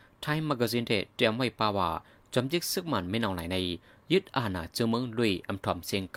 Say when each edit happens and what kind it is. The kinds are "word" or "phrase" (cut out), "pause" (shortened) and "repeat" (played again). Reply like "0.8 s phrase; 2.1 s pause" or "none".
none